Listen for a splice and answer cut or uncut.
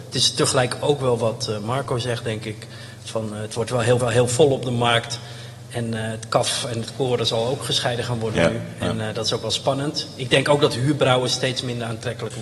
cut